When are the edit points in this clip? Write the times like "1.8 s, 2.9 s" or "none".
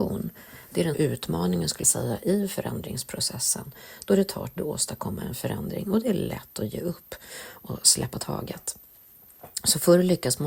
0.9 s, 1.8 s, 4.6 s